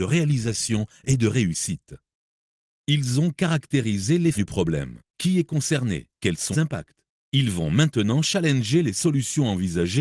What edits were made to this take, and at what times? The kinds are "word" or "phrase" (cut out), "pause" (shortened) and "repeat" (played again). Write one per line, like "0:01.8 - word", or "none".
0:04.3 - word
0:05.1 - pause
0:06.2 - pause
0:06.5 - phrase